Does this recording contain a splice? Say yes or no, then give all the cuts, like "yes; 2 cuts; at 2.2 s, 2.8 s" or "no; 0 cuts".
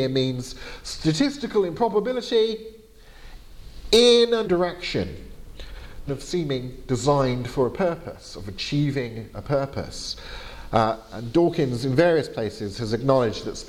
yes; 2 cuts; at 4.4 s, 6.1 s